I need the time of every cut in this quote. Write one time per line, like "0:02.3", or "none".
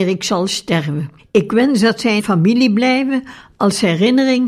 0:01.2
0:02.2